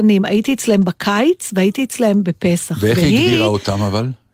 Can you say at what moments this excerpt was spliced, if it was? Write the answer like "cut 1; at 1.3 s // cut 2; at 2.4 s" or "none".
none